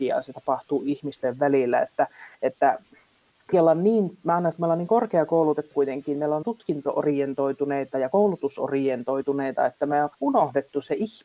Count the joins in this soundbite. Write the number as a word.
six